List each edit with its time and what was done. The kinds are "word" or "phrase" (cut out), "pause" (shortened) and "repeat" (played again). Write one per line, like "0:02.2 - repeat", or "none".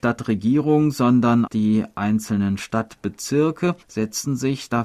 0:01.5 - word
0:03.8 - pause